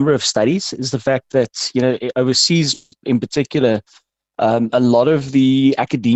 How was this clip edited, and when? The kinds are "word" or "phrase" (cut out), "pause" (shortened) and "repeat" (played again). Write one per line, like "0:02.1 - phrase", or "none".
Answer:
none